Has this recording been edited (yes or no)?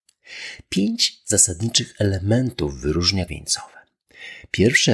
yes